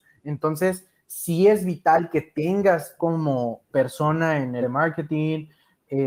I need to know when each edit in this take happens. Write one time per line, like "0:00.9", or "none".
0:03.0
0:03.7
0:04.6